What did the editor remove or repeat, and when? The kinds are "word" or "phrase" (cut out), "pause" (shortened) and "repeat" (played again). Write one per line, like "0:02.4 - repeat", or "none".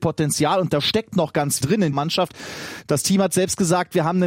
0:01.6 - word
0:01.9 - word